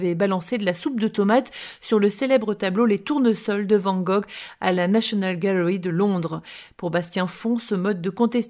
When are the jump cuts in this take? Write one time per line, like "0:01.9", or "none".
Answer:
none

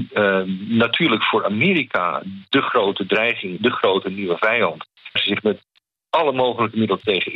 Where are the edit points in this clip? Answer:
0:03.6
0:05.2

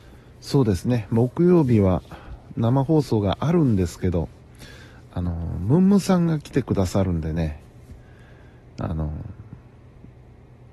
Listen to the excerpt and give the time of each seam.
none

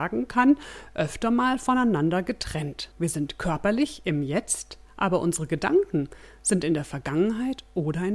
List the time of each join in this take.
0:02.9

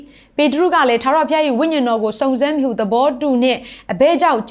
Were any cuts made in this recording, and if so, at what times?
none

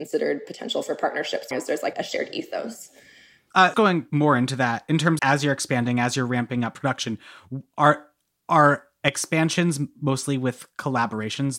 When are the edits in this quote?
0:01.5
0:01.9
0:03.7
0:05.2

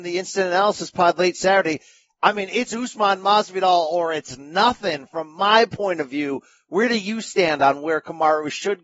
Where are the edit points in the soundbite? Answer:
none

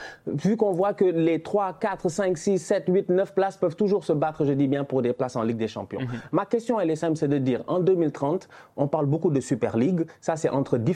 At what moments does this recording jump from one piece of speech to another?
none

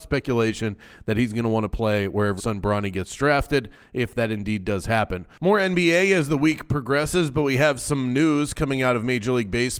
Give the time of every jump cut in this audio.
0:02.4

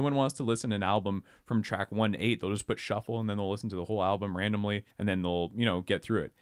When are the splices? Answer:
0:04.9

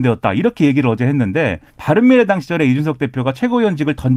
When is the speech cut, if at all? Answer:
0:01.7

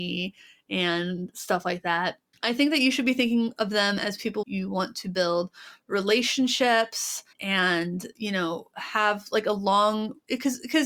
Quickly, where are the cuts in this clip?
0:02.3
0:04.4
0:07.3

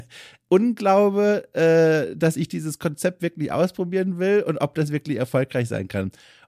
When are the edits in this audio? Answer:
none

